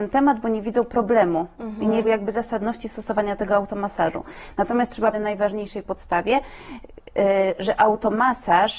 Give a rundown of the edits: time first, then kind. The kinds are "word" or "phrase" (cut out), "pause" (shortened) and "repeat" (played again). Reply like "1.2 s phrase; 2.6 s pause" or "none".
2.0 s word; 5.1 s phrase